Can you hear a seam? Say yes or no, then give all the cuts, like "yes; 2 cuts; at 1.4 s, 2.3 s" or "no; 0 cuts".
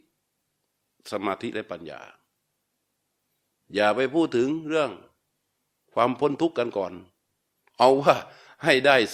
no; 0 cuts